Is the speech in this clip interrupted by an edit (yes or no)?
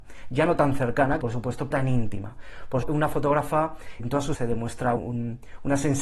yes